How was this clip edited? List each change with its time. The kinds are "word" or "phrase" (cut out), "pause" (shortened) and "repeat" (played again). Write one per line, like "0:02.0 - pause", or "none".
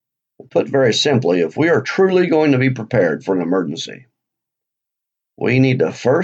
none